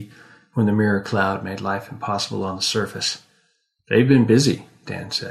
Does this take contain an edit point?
no; 0 cuts

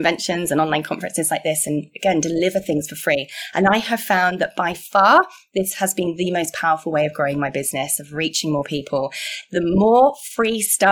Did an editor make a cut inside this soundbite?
no; 0 cuts

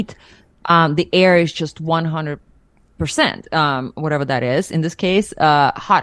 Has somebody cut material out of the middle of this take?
no; 0 cuts

